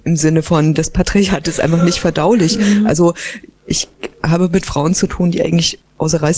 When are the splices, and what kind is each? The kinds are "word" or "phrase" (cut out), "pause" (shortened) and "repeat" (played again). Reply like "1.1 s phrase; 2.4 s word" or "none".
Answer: none